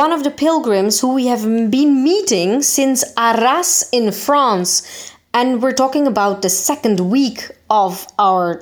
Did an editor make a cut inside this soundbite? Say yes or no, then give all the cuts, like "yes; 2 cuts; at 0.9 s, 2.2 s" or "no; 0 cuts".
no; 0 cuts